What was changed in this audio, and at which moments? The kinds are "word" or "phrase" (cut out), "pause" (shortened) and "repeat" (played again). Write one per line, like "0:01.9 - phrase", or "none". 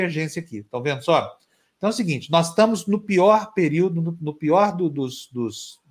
none